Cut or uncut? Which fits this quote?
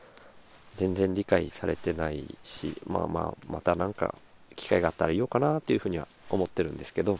uncut